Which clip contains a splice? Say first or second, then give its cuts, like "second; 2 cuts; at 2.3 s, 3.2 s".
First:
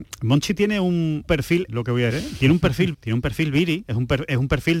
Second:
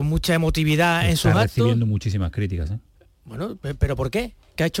first; 4 cuts; at 1.3 s, 1.7 s, 2.1 s, 2.9 s